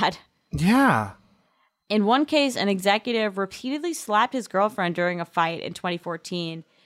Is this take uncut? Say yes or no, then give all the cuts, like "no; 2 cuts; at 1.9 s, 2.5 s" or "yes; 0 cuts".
yes; 0 cuts